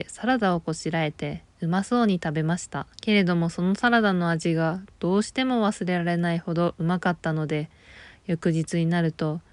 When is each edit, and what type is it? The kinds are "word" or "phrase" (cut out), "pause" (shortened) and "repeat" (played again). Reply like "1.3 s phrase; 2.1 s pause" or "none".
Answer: 2.9 s pause